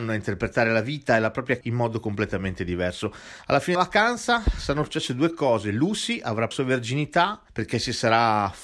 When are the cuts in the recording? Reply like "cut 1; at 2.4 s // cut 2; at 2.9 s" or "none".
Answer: cut 1; at 1.6 s // cut 2; at 3.8 s // cut 3; at 6.5 s // cut 4; at 7.5 s